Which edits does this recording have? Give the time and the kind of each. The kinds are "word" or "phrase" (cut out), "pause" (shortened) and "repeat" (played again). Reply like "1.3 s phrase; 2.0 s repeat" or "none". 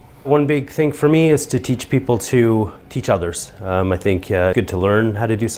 4.5 s word